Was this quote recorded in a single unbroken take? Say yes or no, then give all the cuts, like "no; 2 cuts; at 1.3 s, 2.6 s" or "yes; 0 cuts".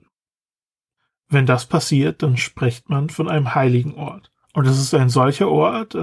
no; 1 cut; at 4.4 s